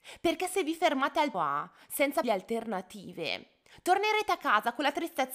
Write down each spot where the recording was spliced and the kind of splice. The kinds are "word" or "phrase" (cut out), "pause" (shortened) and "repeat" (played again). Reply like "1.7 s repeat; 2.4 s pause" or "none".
1.3 s word; 2.2 s phrase